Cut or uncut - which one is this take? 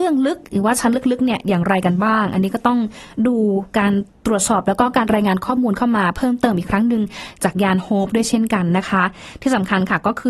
uncut